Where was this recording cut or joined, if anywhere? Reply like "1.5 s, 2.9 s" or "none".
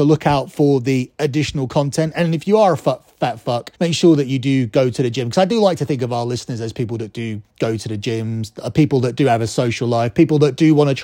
3.7 s